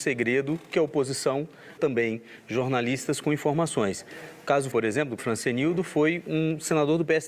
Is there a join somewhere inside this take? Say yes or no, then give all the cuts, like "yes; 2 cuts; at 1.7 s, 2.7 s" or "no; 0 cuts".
yes; 3 cuts; at 1.8 s, 4.7 s, 5.2 s